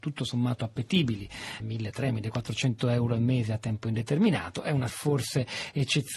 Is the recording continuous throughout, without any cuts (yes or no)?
no